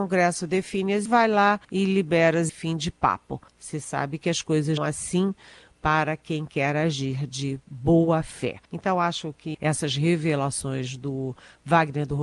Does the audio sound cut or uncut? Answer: cut